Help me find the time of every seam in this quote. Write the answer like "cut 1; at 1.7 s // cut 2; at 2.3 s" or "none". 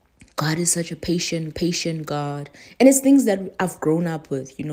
cut 1; at 1.5 s